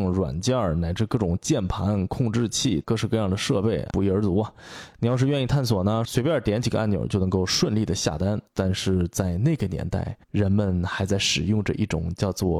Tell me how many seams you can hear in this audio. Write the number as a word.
three